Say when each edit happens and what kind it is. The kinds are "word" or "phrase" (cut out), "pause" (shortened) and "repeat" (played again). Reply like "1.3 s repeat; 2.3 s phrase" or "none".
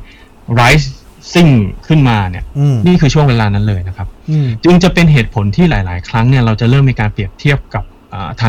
none